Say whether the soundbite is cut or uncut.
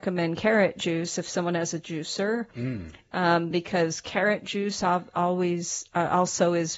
uncut